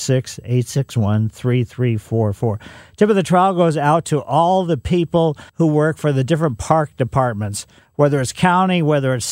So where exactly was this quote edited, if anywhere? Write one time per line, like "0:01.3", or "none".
0:05.5